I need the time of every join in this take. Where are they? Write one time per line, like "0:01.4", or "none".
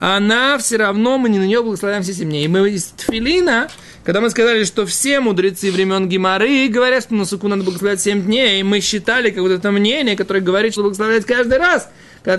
0:10.8